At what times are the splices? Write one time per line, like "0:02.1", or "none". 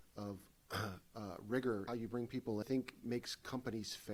0:01.9
0:02.6